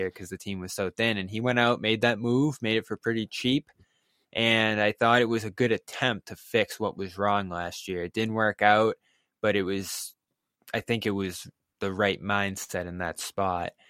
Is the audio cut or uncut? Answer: uncut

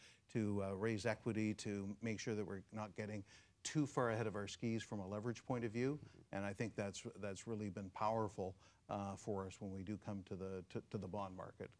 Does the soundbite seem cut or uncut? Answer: uncut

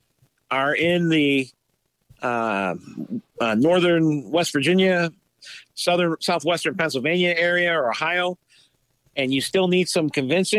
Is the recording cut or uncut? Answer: uncut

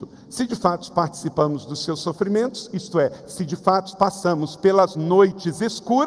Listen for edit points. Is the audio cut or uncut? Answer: uncut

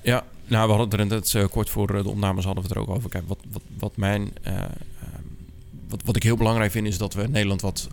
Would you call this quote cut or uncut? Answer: uncut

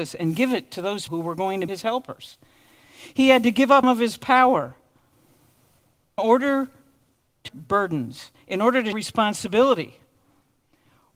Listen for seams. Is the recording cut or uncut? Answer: cut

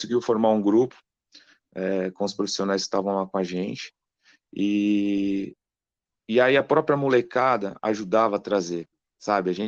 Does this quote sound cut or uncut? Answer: uncut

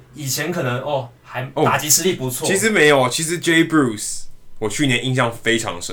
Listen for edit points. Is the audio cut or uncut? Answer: uncut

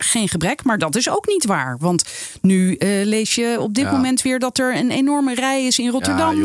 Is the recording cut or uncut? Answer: uncut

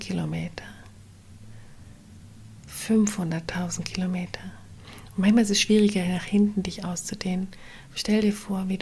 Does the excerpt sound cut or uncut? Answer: uncut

